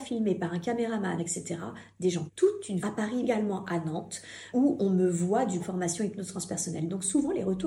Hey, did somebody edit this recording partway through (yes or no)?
yes